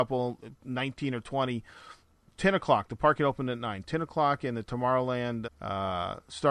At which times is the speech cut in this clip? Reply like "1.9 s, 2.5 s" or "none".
5.5 s